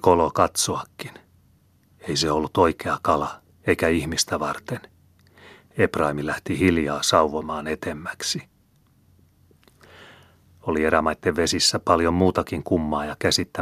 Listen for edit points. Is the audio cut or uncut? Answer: uncut